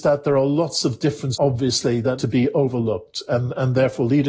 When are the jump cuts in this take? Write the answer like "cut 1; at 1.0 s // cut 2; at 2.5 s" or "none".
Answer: cut 1; at 1.3 s // cut 2; at 2.2 s